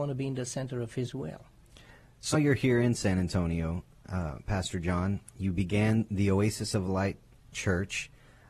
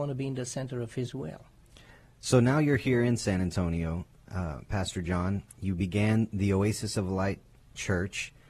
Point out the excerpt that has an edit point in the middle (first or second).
first